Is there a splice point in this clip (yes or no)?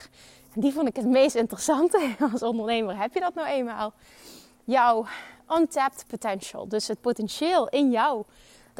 no